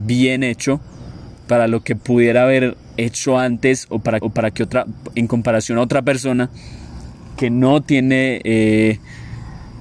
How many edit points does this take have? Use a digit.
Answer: 1